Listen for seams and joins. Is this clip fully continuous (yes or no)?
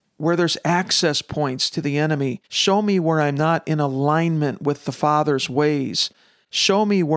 no